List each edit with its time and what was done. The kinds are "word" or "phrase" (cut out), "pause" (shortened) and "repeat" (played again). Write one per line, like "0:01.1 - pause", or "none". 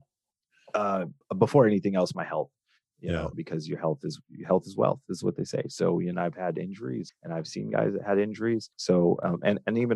0:01.2 - pause
0:03.3 - word
0:06.1 - word
0:07.1 - word
0:08.7 - pause